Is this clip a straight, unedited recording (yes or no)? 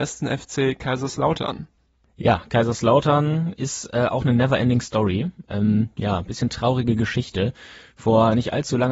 yes